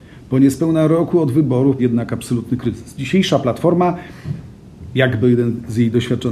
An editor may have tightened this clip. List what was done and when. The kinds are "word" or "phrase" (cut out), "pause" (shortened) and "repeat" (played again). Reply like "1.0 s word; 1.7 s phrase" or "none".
1.8 s word; 5.2 s phrase